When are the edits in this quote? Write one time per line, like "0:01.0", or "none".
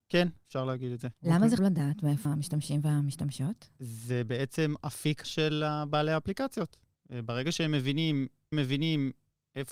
0:01.1
0:01.6
0:02.2
0:05.2
0:08.5